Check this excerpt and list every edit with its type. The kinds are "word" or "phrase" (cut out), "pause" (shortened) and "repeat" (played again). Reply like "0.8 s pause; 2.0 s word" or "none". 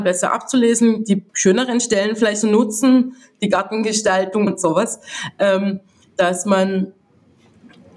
1.3 s pause; 2.4 s phrase; 4.5 s word